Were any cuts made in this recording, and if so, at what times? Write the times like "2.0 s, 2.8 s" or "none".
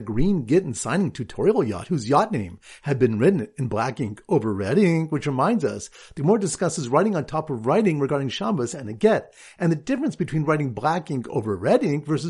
none